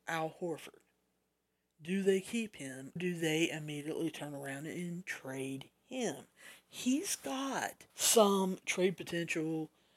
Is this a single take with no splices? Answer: no; 2 cuts; at 3.0 s, 7.9 s

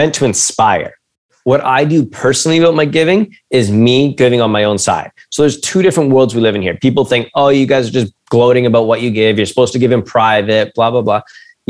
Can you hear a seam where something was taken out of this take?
no; 0 cuts

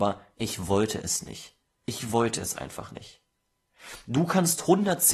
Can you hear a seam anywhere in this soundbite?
no; 0 cuts

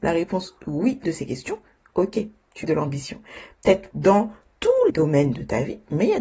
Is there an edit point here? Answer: yes; 4 cuts; at 1.0 s, 2.6 s, 3.9 s, 4.9 s

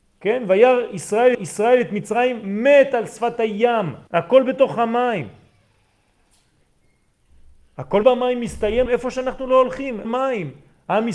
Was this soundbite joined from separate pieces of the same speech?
yes; 5 cuts; at 1.3 s, 4.1 s, 8.0 s, 8.9 s, 10.0 s

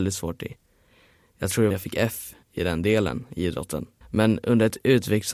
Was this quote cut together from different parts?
yes; 3 cuts; at 1.7 s, 2.4 s, 4.0 s

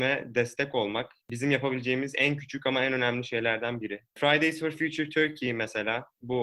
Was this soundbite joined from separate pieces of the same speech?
yes; 1 cut; at 1.2 s

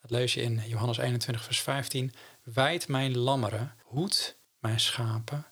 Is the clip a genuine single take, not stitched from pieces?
no; 1 cut; at 3.8 s

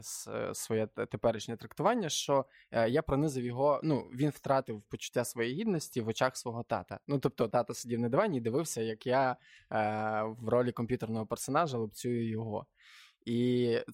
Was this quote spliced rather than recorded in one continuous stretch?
yes; 1 cut; at 7.5 s

